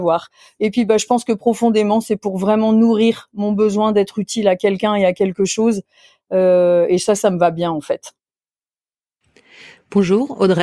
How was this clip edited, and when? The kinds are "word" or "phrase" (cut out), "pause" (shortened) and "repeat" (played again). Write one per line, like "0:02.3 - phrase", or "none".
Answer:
none

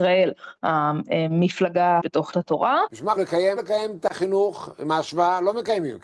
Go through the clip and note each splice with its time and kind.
0:02.0 - word
0:02.3 - word
0:03.2 - phrase
0:03.6 - word

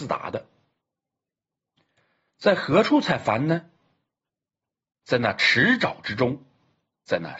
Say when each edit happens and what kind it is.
none

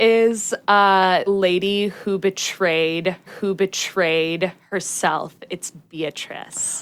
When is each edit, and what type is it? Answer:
0:01.3 - word
0:03.3 - repeat

